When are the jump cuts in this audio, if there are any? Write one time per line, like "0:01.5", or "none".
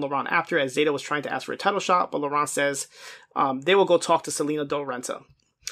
none